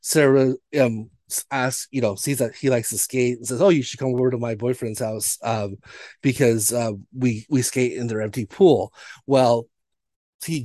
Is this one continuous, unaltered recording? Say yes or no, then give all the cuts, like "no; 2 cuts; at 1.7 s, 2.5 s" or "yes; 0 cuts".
yes; 0 cuts